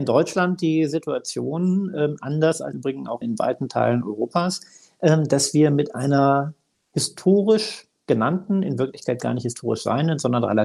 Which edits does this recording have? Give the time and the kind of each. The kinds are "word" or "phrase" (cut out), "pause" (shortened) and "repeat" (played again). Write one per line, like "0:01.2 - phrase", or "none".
0:02.7 - word
0:03.2 - word